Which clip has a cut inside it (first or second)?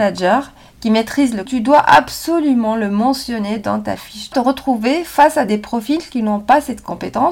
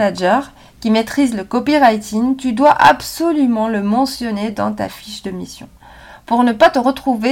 first